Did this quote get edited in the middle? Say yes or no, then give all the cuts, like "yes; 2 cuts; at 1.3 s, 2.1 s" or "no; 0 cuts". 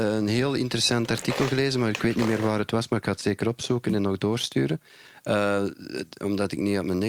no; 0 cuts